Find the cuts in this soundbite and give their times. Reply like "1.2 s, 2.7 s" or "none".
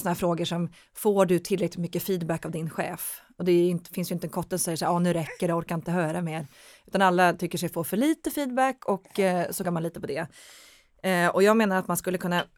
9.6 s